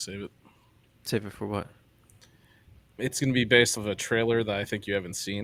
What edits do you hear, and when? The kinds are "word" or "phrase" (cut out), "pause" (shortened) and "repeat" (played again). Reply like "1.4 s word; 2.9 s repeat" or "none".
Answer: 3.0 s word; 3.7 s word